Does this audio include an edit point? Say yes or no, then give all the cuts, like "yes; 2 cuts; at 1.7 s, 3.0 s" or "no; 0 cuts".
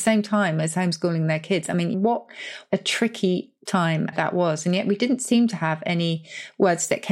yes; 3 cuts; at 1.9 s, 3.7 s, 4.1 s